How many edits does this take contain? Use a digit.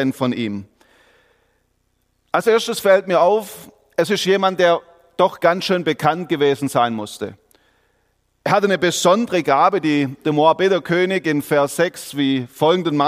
0